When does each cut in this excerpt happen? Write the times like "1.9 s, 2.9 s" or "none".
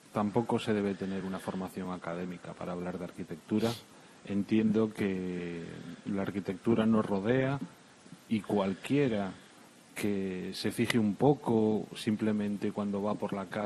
none